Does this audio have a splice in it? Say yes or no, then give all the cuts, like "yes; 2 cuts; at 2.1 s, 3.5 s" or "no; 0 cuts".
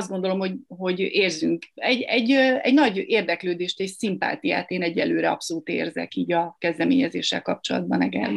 no; 0 cuts